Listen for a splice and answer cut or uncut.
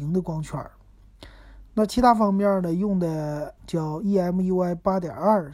cut